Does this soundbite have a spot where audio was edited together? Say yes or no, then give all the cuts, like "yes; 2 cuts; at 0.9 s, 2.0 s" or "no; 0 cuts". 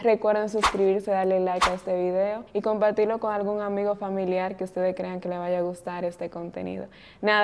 yes; 1 cut; at 2.5 s